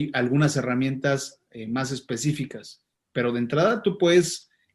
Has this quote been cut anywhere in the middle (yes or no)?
no